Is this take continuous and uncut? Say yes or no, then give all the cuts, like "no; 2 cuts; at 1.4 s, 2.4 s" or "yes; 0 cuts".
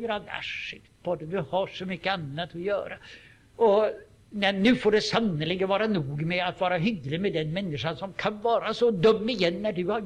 yes; 0 cuts